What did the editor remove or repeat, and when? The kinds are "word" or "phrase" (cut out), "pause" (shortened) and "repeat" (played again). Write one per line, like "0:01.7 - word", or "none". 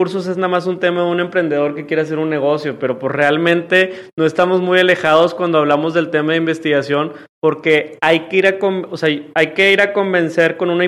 none

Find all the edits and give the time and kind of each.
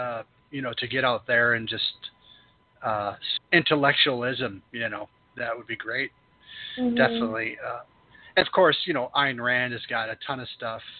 0:03.4 - phrase
0:04.7 - pause
0:08.4 - word

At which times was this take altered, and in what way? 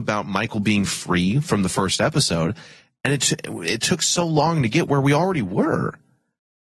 none

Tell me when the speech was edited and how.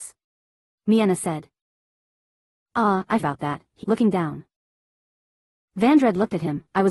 0:03.2 - word
0:03.8 - word

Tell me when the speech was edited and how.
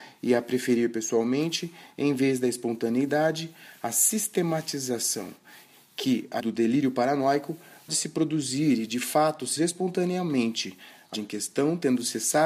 0:06.4 - word
0:07.9 - word
0:09.6 - word
0:11.1 - word

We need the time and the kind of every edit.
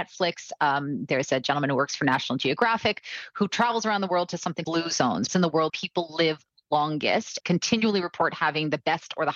0:04.6 - word
0:05.3 - word
0:05.7 - word
0:07.4 - word

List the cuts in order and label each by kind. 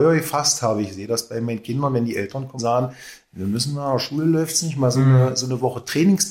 0:02.6 - word

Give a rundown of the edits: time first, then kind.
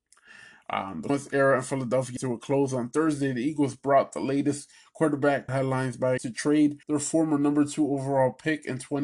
0:01.1 - word
0:02.2 - phrase
0:05.5 - phrase
0:06.2 - word
0:06.8 - pause

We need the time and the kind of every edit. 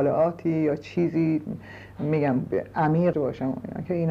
0:03.1 - word

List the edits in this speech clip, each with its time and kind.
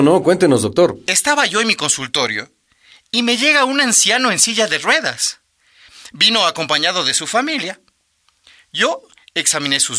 none

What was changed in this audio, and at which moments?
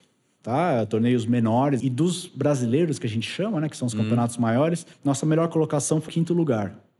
0:01.8 - word
0:04.9 - pause
0:06.1 - word

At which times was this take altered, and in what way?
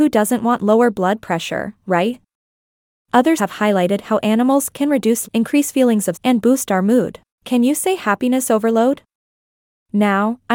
0:03.4 - word
0:05.2 - word
0:06.1 - phrase
0:07.3 - pause

